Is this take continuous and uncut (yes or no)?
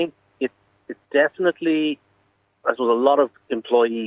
no